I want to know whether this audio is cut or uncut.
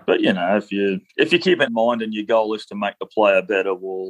cut